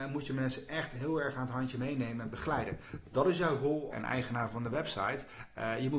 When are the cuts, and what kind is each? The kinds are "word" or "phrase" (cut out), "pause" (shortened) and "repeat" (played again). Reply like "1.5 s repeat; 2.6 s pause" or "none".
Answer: 3.9 s phrase